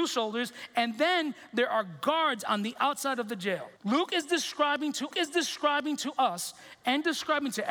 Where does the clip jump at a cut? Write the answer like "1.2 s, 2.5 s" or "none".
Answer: 3.8 s, 5.1 s